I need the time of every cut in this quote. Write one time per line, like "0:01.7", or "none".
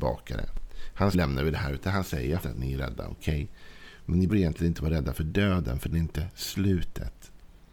0:01.1
0:02.4
0:04.3
0:05.9